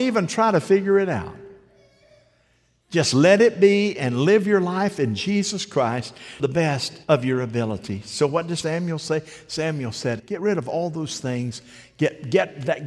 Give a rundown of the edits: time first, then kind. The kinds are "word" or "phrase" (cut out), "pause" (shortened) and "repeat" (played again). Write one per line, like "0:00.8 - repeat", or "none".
0:06.4 - word
0:07.0 - pause
0:08.6 - word
0:10.2 - word

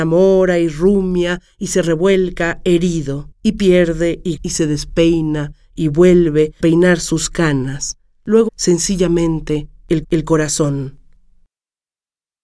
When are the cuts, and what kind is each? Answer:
0:03.3 - pause
0:04.4 - word
0:06.6 - word
0:08.5 - word
0:10.0 - repeat

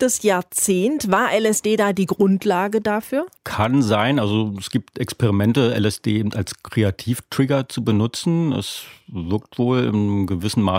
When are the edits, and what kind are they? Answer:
0:03.4 - pause

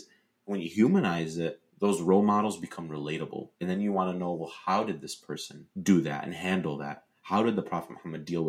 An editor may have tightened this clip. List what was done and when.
0:01.7 - pause
0:03.5 - pause
0:05.7 - pause

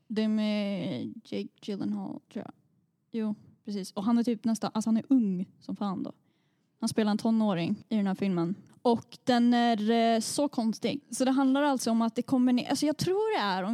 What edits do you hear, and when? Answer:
none

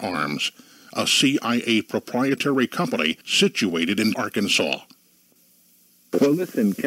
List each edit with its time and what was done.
0:03.2 - pause
0:04.1 - word

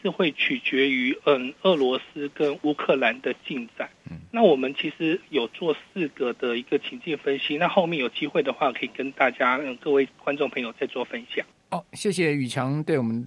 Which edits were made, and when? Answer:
0:11.5 - pause

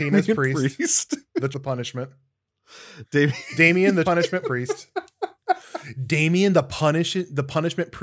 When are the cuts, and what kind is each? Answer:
0:01.5 - word
0:04.0 - word
0:04.4 - word

